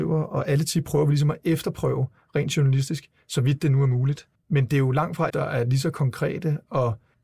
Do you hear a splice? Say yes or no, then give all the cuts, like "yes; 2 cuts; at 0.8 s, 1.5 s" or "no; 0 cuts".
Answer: yes; 2 cuts; at 4.4 s, 5.3 s